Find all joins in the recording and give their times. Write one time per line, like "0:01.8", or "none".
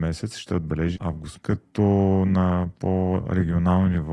0:01.0
0:01.4